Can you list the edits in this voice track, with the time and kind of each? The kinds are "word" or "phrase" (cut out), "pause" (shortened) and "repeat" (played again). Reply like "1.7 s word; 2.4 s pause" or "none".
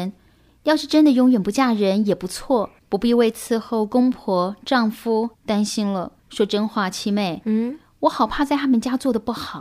2.8 s pause; 5.3 s pause; 6.2 s pause